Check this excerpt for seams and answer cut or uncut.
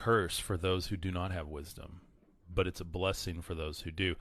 uncut